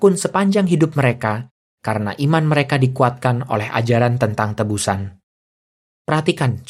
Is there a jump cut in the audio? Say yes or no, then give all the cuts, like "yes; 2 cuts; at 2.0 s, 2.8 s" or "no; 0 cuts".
no; 0 cuts